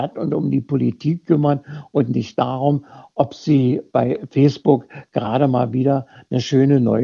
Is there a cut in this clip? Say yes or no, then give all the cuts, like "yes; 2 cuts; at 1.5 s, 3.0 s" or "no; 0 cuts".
no; 0 cuts